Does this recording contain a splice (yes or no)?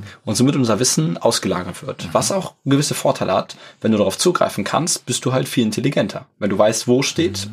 no